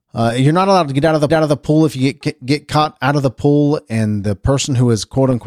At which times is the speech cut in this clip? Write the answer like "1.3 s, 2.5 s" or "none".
1.3 s